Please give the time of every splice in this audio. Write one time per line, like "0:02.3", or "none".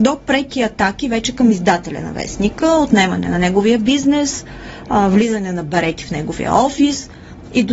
none